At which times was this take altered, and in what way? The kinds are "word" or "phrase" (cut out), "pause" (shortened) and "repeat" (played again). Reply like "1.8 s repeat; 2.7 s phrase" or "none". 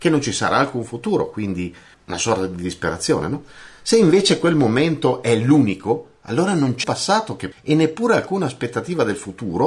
1.9 s word; 6.8 s word; 7.5 s word